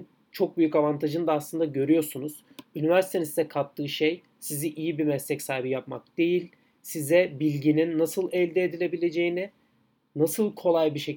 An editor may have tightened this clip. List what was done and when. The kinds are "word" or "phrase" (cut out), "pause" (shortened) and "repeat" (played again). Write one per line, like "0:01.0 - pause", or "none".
none

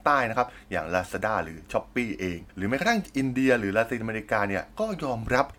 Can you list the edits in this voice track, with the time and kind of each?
0:02.5 - pause

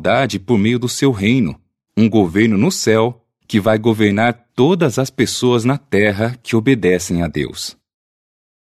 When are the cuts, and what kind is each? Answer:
none

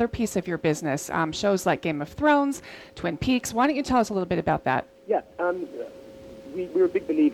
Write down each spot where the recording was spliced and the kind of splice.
0:05.0 - pause

